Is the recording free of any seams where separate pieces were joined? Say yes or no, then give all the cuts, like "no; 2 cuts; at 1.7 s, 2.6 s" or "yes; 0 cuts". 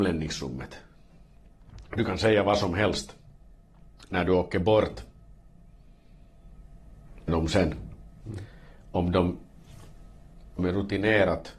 no; 2 cuts; at 7.3 s, 10.6 s